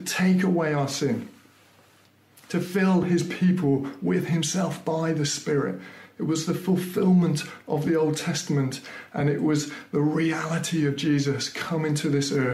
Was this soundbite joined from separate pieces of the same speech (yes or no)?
no